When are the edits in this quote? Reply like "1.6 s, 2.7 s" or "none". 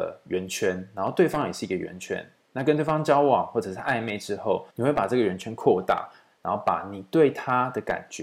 4.7 s